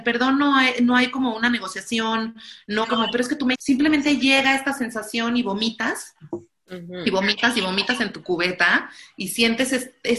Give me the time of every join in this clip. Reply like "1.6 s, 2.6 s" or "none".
2.8 s, 3.5 s